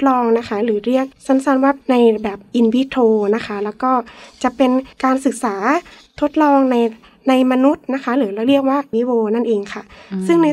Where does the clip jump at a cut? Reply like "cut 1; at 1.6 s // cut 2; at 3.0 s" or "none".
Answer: cut 1; at 1.8 s // cut 2; at 4.9 s // cut 3; at 8.9 s